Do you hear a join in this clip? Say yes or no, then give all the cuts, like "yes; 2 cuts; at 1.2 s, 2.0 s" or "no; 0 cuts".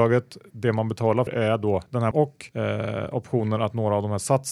yes; 3 cuts; at 1.3 s, 2.1 s, 2.5 s